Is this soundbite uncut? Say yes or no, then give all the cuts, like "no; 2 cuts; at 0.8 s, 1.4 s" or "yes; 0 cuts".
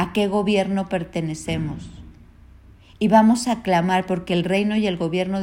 yes; 0 cuts